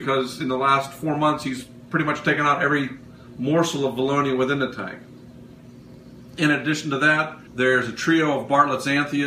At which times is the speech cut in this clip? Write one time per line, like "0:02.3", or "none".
0:07.5